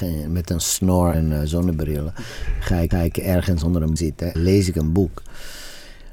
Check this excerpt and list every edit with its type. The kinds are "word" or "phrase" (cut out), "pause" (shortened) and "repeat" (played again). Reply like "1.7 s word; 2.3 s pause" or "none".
1.1 s word; 2.9 s repeat; 4.0 s word; 4.3 s word